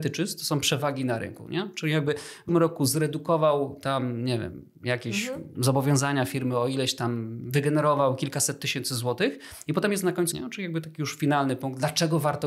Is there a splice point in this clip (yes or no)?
yes